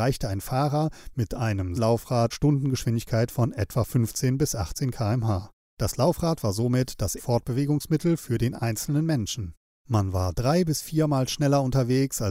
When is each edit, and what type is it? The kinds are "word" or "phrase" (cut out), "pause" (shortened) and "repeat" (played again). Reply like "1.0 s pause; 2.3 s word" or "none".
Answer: 1.8 s word; 2.3 s word; 5.6 s pause; 7.2 s phrase; 9.7 s pause